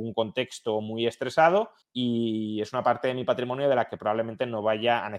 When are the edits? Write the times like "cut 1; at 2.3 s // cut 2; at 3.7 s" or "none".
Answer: cut 1; at 1.8 s